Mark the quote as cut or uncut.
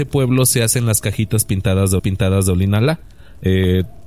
cut